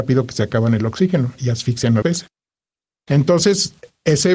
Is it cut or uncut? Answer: cut